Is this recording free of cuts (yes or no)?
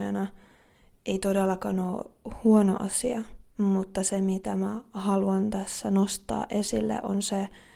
no